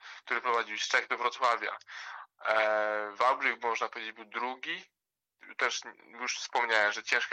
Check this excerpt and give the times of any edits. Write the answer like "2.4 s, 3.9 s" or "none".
none